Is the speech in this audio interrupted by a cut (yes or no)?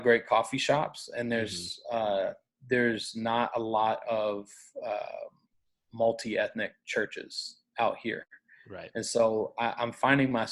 no